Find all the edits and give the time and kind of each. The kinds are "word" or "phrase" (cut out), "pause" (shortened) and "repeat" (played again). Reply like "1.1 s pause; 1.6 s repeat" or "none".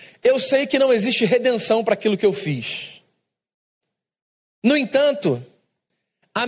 none